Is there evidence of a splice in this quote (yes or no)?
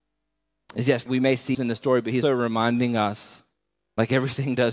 yes